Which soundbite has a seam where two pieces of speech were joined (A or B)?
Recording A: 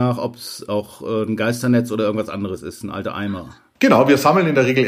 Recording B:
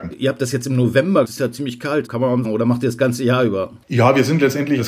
B